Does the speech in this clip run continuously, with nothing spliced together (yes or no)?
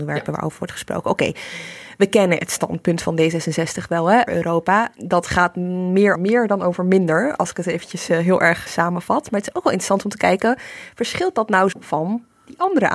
no